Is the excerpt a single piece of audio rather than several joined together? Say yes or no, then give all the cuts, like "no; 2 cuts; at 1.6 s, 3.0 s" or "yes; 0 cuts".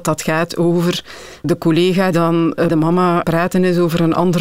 no; 4 cuts; at 1.4 s, 2.1 s, 2.7 s, 3.2 s